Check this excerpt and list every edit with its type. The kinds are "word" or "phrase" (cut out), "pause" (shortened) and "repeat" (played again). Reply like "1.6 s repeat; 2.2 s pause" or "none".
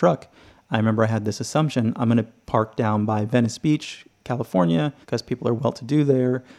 5.0 s pause